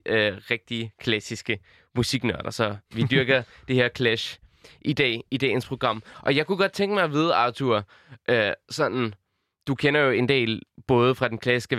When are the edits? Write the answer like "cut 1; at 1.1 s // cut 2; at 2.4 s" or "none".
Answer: none